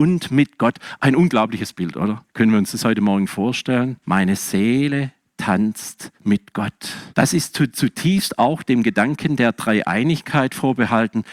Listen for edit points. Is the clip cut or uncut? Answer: cut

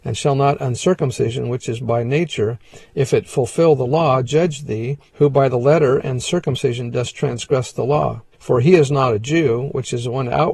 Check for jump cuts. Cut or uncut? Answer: cut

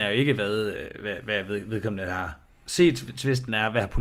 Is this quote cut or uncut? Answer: uncut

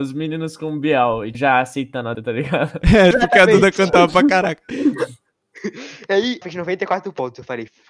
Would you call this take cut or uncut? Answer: cut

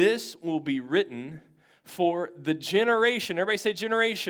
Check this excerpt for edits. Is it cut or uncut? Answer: uncut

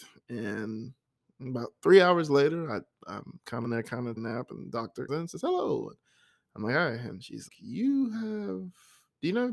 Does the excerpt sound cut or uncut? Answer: cut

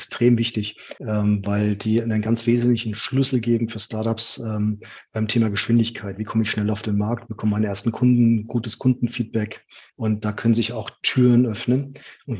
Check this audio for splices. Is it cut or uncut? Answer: cut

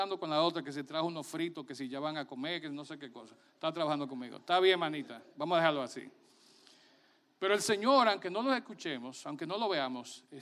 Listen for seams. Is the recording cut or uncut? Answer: uncut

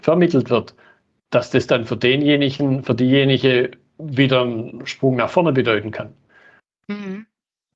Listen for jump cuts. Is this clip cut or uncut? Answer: uncut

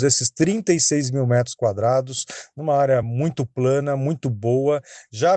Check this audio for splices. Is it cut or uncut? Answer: uncut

